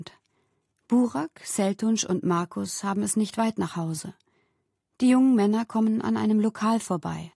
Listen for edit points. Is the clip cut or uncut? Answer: uncut